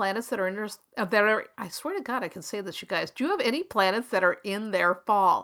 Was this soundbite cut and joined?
no; 0 cuts

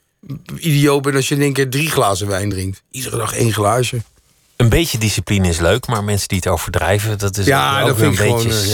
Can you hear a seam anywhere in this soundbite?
no; 0 cuts

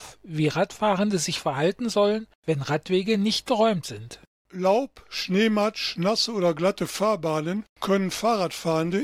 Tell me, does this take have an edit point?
no; 0 cuts

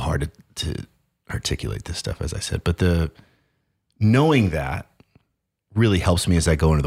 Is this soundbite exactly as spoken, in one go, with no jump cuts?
yes; 0 cuts

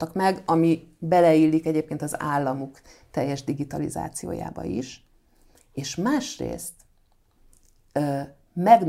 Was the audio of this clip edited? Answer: no; 0 cuts

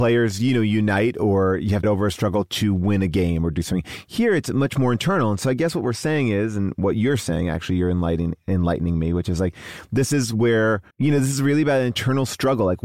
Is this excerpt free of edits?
no; 2 cuts; at 1.8 s, 10.9 s

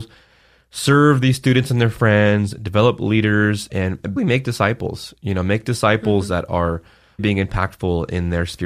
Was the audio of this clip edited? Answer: yes; 2 cuts; at 4.2 s, 7.2 s

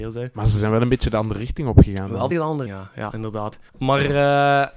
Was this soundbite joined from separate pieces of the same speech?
yes; 4 cuts; at 2.3 s, 2.7 s, 3.1 s, 3.7 s

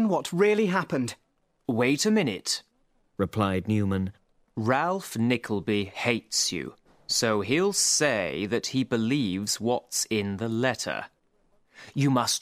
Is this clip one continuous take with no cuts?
yes; 0 cuts

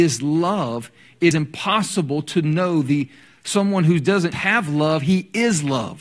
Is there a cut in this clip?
yes; 2 cuts; at 1.3 s, 4.3 s

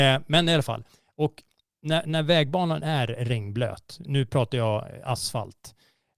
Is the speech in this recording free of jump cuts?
no; 1 cut; at 4.1 s

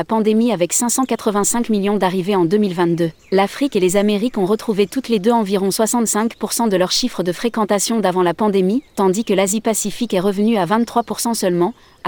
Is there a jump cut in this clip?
yes; 2 cuts; at 3.2 s, 8.9 s

